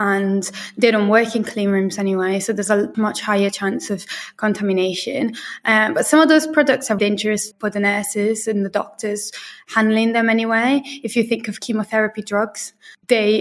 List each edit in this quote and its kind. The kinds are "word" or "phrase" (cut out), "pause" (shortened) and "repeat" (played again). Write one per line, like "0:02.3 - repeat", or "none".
0:02.9 - word
0:07.0 - word
0:07.5 - word